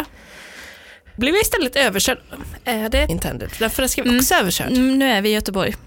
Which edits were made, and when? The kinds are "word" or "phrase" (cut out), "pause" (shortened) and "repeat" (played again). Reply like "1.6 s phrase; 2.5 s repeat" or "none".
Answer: 1.2 s word; 3.1 s word